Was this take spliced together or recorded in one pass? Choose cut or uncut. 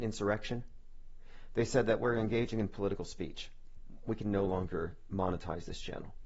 uncut